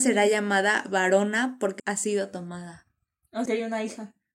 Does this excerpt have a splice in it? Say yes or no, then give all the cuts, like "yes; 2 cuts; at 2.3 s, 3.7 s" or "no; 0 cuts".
yes; 2 cuts; at 1.8 s, 3.5 s